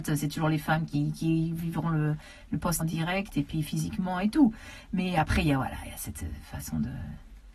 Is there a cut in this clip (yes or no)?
yes